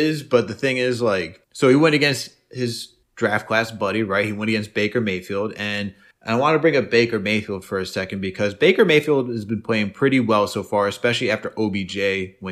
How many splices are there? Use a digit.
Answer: 3